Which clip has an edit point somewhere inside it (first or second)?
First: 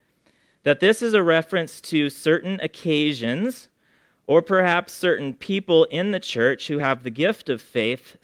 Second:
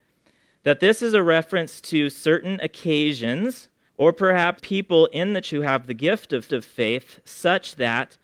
second